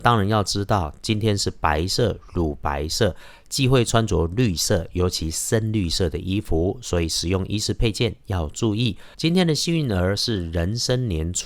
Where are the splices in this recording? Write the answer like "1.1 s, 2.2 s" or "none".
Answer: 9.1 s